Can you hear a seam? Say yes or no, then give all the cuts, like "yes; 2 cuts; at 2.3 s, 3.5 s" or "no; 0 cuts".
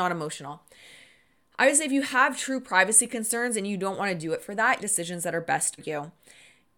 yes; 2 cuts; at 4.8 s, 5.8 s